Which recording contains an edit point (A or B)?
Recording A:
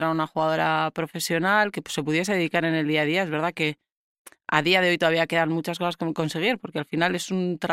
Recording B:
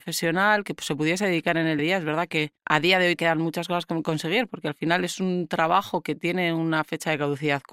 B